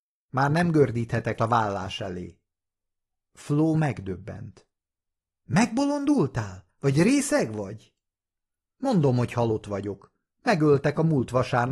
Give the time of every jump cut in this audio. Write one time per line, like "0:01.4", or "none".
0:01.4